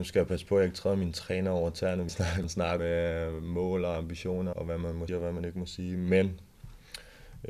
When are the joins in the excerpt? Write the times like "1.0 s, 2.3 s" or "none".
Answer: 2.1 s, 2.4 s, 2.8 s, 4.5 s, 5.1 s